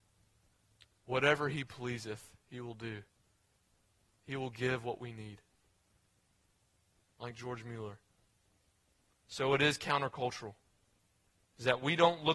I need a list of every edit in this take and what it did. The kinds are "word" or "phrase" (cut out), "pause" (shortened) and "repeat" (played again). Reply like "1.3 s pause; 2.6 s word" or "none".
none